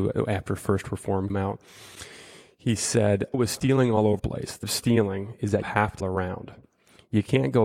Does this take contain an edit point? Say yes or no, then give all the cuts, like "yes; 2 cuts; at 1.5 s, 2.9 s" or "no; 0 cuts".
yes; 6 cuts; at 1.3 s, 3.3 s, 4.2 s, 4.6 s, 5.6 s, 6.0 s